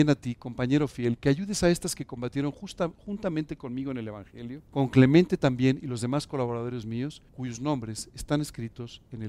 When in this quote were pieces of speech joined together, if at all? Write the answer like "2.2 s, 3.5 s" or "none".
4.7 s, 7.3 s